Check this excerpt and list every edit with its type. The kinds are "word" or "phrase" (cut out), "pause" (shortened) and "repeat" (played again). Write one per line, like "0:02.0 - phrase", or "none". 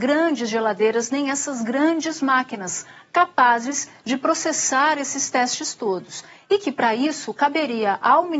none